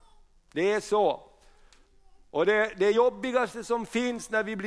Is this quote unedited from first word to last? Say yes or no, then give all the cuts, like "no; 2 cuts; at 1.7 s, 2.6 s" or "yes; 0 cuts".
yes; 0 cuts